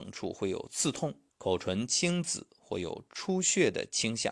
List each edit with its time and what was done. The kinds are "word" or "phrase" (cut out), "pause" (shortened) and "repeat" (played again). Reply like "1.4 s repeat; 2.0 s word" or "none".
1.3 s pause